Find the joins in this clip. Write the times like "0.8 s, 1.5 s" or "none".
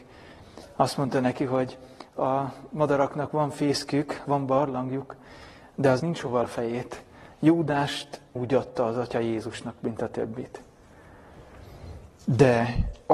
4.2 s, 6.0 s, 6.4 s, 8.4 s